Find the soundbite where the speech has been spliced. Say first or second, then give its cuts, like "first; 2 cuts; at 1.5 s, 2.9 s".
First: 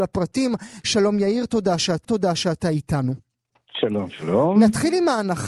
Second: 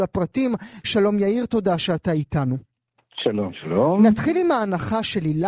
first; 1 cut; at 2.0 s